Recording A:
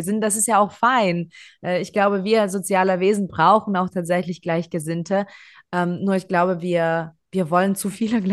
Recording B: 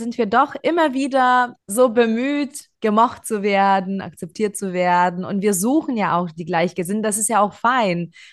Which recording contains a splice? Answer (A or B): B